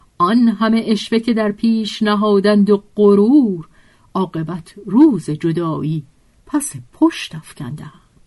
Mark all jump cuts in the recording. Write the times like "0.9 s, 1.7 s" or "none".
none